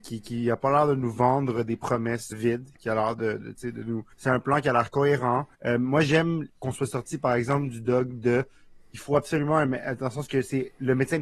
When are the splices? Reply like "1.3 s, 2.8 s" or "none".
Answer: 2.3 s, 3.4 s, 4.1 s, 5.5 s, 6.5 s